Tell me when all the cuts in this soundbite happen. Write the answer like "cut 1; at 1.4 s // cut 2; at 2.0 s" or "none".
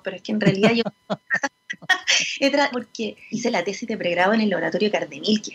cut 1; at 2.7 s // cut 2; at 3.3 s